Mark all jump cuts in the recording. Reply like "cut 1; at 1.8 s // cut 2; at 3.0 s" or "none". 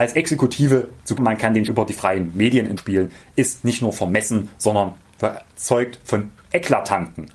cut 1; at 1.2 s // cut 2; at 1.7 s // cut 3; at 2.8 s

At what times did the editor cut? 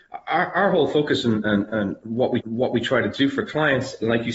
cut 1; at 2.4 s

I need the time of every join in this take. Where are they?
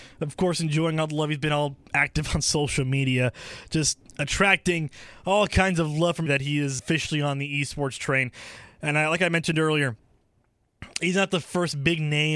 cut 1; at 6.3 s // cut 2; at 6.8 s

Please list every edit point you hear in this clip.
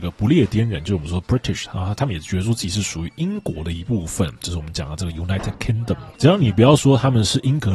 cut 1; at 6.1 s

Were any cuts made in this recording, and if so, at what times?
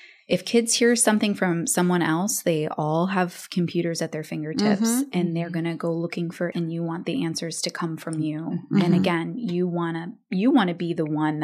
cut 1; at 6.5 s

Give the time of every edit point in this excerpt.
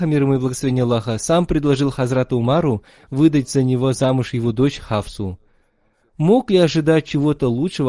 none

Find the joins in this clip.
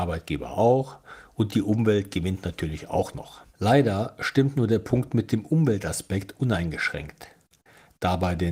cut 1; at 3.5 s

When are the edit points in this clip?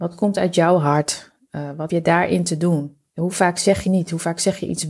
cut 1; at 1.9 s // cut 2; at 3.1 s // cut 3; at 3.8 s

